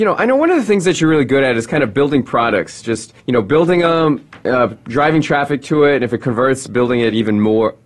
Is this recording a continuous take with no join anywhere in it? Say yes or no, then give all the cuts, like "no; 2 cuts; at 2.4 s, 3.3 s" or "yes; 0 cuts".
no; 1 cut; at 3.2 s